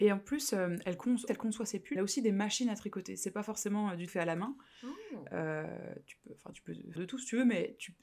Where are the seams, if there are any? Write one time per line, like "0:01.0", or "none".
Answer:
0:01.3
0:02.0
0:04.1
0:07.0